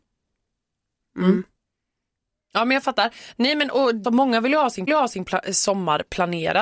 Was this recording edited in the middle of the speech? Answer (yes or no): yes